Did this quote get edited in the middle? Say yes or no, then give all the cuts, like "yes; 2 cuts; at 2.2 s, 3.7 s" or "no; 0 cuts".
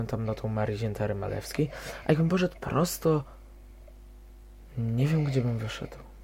no; 0 cuts